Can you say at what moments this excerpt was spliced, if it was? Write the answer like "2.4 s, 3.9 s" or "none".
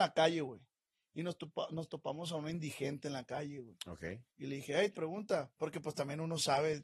4.3 s, 4.9 s